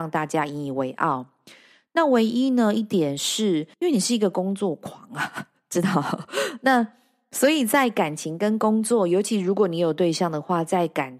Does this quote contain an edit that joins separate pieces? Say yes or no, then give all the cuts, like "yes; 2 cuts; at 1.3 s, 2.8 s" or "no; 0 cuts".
yes; 1 cut; at 3.7 s